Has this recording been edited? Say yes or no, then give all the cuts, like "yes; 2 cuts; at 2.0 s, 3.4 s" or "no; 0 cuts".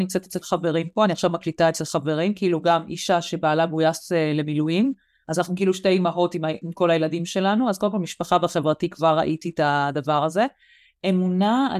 no; 0 cuts